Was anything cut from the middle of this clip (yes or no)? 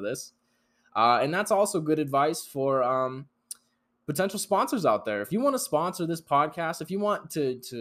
no